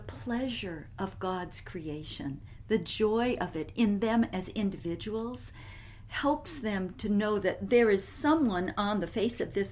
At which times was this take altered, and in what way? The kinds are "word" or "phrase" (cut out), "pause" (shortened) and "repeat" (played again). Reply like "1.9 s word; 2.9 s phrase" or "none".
none